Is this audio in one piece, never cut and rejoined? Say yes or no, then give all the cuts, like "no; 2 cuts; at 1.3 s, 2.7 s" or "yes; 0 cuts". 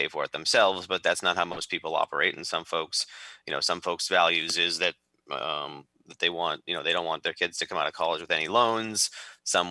yes; 0 cuts